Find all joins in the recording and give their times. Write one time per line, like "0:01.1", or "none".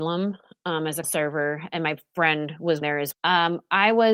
0:01.0
0:02.8
0:03.1